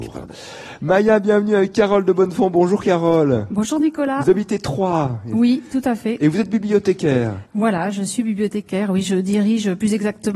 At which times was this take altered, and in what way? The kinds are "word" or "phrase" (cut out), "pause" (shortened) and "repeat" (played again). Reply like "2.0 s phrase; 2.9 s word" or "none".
7.4 s pause